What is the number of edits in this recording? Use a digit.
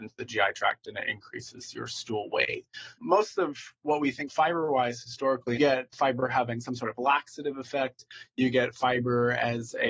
4